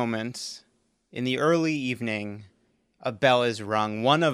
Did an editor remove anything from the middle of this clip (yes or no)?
no